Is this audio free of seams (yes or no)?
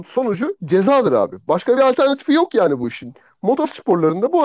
yes